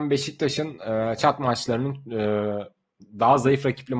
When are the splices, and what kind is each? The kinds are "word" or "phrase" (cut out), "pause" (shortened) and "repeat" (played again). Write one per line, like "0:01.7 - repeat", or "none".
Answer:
0:01.2 - word